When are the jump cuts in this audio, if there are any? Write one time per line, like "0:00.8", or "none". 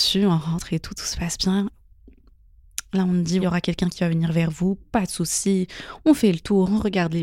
0:03.4